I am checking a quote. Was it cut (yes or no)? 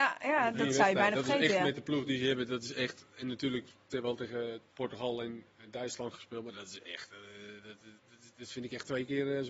yes